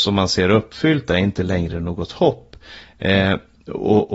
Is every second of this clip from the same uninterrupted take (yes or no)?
yes